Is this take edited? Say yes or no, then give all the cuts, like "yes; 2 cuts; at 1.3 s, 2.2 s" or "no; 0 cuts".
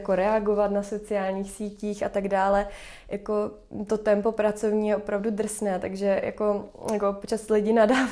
no; 0 cuts